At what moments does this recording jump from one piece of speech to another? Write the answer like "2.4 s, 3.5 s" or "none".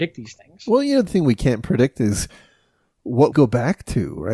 1.1 s, 3.3 s